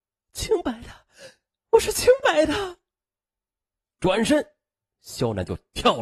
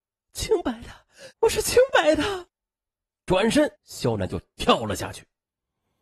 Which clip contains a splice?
second; 3 cuts; at 1.3 s, 2.5 s, 3.8 s

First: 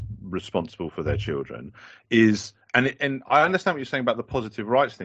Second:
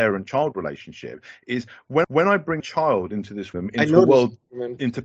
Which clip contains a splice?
second; 3 cuts; at 2.0 s, 2.6 s, 3.5 s

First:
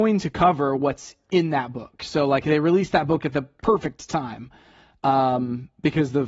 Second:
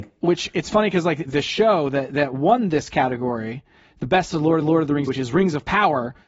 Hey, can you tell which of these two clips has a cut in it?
second; 3 cuts; at 1.3 s, 4.6 s, 5.1 s

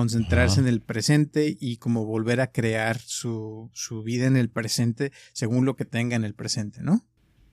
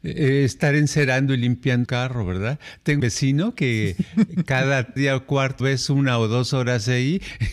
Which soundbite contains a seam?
second; 4 cuts; at 1.8 s, 3.0 s, 5.0 s, 5.6 s

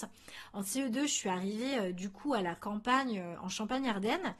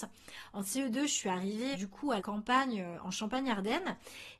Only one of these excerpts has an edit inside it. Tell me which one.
second; 2 cuts; at 1.7 s, 2.2 s

